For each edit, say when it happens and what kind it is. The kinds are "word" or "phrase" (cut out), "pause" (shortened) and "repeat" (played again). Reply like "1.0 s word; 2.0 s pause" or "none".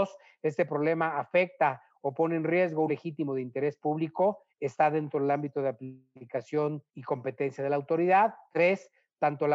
2.9 s word; 4.5 s pause; 6.9 s pause